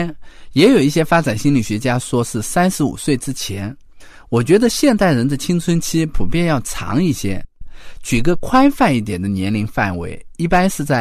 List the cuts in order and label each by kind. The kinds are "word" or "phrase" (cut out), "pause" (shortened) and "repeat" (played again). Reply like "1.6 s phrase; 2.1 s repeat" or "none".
none